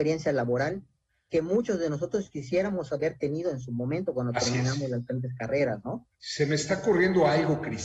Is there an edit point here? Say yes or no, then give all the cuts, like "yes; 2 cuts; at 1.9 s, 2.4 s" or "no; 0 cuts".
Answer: no; 0 cuts